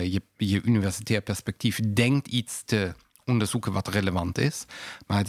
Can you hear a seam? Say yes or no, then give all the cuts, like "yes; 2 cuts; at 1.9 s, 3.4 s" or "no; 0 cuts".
no; 0 cuts